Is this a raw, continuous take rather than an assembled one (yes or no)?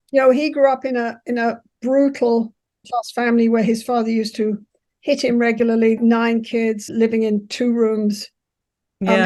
no